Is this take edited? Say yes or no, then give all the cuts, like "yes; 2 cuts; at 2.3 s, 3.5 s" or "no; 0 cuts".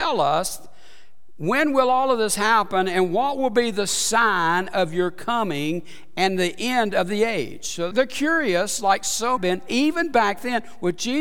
yes; 2 cuts; at 7.9 s, 9.4 s